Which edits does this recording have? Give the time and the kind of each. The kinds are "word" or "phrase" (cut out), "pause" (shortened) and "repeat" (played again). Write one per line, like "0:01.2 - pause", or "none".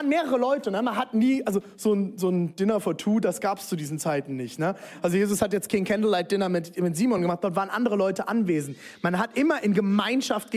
none